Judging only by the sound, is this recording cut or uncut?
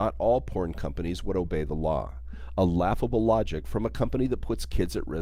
uncut